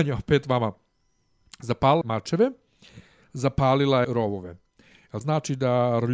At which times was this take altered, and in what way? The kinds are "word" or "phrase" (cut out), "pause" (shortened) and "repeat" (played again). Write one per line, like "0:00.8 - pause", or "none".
0:02.0 - word
0:04.0 - word
0:05.2 - word